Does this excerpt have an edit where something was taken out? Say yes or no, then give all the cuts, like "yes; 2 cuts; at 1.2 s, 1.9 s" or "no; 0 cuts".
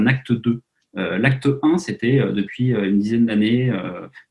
no; 0 cuts